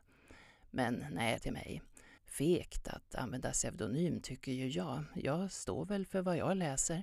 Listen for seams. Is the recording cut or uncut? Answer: cut